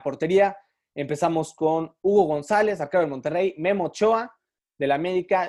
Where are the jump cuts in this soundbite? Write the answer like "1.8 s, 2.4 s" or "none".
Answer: none